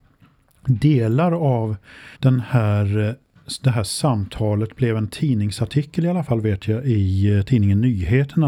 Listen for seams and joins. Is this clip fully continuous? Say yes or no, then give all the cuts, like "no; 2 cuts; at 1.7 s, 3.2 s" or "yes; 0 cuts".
no; 1 cut; at 2.1 s